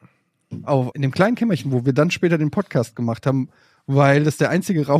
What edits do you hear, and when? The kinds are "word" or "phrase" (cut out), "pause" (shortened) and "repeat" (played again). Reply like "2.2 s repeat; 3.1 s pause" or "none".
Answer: 0.9 s word

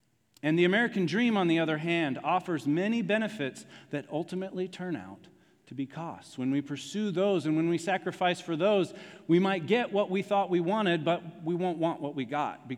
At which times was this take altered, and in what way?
none

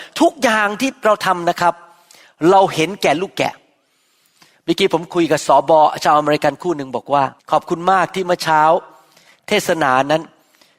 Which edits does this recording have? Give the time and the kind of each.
7.4 s pause

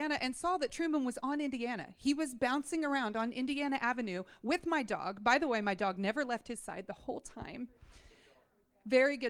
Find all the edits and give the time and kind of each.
none

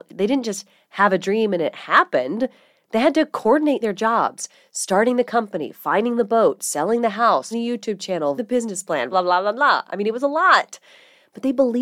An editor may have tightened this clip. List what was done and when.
3.8 s word; 7.5 s word; 8.4 s word; 9.1 s word

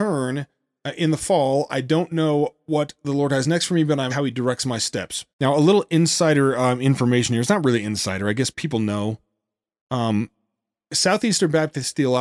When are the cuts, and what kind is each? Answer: 4.1 s phrase; 5.3 s pause; 8.5 s word

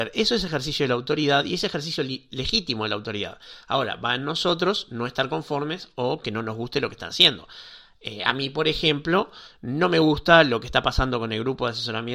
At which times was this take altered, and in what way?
none

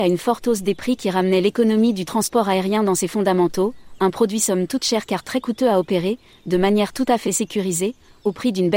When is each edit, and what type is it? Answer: none

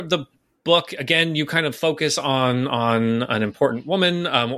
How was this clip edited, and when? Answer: none

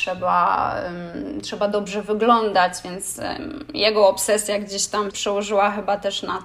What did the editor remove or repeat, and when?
5.1 s word

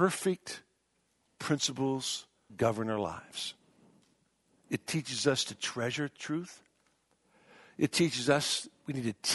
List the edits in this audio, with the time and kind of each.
2.5 s word

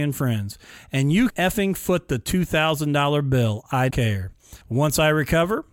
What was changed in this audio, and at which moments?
1.3 s word; 3.9 s word; 4.6 s pause

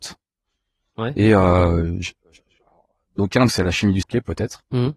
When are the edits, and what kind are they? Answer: 3.5 s word; 4.0 s word

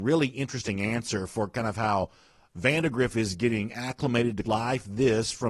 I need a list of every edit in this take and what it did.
4.4 s word

